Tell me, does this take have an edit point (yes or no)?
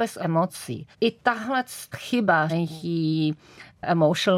yes